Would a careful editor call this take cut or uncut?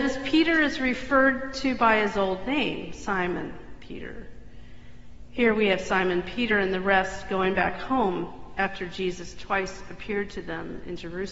uncut